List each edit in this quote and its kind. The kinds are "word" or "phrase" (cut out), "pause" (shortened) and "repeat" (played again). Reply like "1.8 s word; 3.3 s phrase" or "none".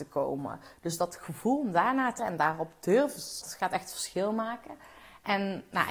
2.2 s word; 3.4 s word